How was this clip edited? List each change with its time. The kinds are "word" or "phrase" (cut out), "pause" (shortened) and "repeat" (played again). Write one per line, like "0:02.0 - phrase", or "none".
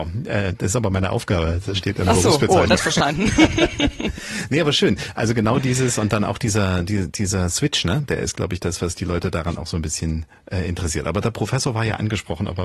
0:02.8 - phrase